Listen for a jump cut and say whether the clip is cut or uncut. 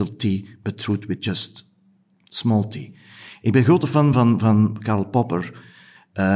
uncut